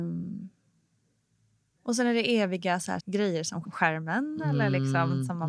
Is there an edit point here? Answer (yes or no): yes